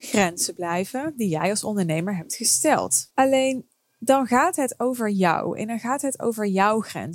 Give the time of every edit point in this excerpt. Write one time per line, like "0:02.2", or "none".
0:03.1